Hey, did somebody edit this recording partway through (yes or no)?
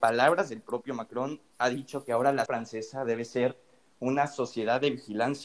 yes